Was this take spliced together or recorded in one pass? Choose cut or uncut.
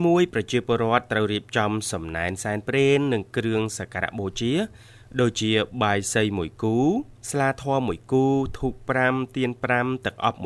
cut